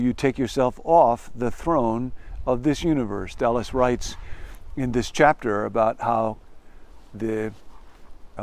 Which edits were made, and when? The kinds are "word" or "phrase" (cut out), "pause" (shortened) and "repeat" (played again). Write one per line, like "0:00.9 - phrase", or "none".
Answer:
none